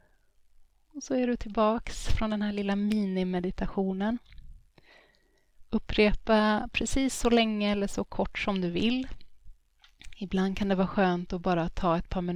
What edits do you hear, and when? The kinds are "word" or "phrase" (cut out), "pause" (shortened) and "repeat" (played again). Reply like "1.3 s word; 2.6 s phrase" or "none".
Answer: none